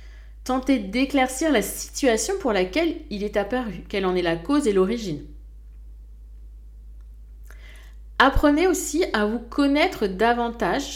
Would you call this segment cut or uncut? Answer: uncut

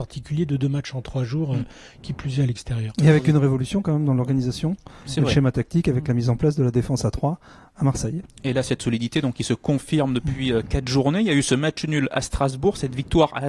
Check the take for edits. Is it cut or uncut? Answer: uncut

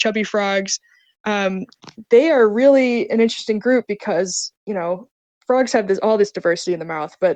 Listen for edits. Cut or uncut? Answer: uncut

